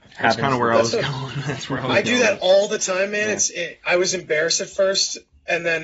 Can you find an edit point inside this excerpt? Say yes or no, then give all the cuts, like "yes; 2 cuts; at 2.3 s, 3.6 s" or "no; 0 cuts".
no; 0 cuts